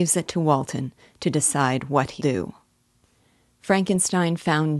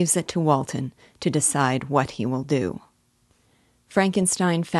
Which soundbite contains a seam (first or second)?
first